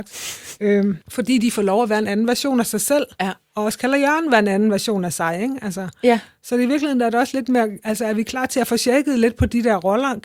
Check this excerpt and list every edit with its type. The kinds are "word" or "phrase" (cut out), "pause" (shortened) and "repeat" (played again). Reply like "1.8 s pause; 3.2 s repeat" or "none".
1.0 s pause